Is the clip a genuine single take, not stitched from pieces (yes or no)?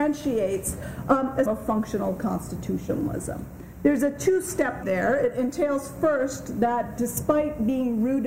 no